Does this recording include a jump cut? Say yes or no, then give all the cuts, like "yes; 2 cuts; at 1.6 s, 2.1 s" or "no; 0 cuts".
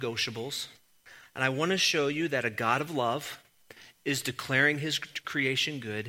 no; 0 cuts